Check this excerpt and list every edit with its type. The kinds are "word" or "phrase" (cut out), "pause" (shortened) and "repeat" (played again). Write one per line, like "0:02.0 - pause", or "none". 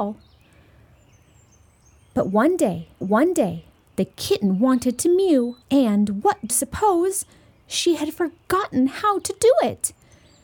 0:03.0 - repeat
0:05.6 - pause
0:06.5 - word